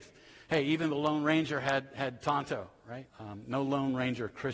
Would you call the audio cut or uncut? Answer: cut